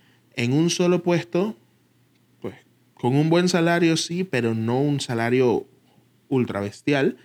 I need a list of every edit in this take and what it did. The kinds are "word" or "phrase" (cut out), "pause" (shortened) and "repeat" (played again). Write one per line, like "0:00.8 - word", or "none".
none